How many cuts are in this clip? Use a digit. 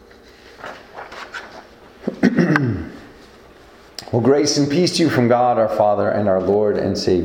0